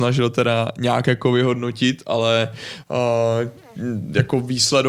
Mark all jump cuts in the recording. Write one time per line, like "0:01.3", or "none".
none